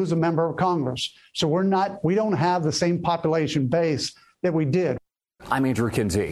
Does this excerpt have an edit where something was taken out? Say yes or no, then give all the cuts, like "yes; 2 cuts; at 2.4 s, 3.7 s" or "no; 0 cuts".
no; 0 cuts